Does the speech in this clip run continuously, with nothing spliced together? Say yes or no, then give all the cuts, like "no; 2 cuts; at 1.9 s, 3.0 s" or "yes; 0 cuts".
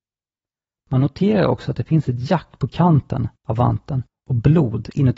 no; 1 cut; at 3.4 s